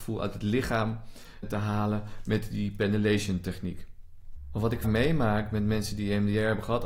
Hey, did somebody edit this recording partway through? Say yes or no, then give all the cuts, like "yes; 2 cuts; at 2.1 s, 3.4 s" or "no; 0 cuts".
yes; 2 cuts; at 1.4 s, 4.8 s